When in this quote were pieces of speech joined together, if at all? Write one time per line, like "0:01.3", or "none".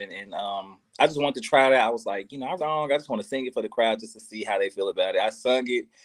0:02.6